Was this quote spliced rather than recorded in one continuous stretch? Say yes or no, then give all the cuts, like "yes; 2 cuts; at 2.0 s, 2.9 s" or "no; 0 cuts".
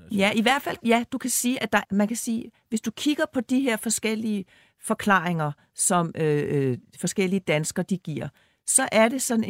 yes; 1 cut; at 1.8 s